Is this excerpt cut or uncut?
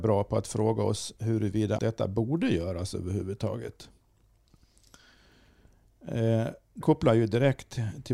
cut